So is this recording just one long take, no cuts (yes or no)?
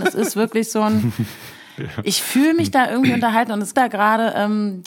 no